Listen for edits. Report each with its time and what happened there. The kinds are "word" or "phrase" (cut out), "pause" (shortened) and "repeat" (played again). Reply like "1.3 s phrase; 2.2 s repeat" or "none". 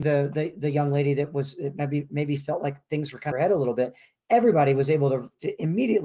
3.3 s phrase